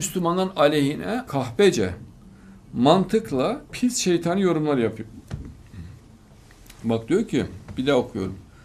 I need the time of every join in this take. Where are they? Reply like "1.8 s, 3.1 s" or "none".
1.3 s, 3.7 s